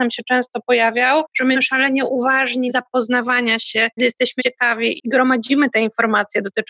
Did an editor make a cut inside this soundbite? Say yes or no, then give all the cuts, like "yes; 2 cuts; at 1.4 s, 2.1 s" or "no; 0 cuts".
yes; 5 cuts; at 1.5 s, 2.7 s, 4.0 s, 4.4 s, 5.0 s